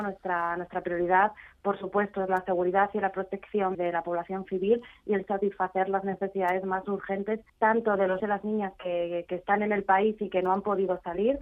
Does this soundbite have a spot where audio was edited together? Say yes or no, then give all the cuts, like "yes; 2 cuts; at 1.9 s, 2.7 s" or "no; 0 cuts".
yes; 3 cuts; at 3.7 s, 7.5 s, 8.2 s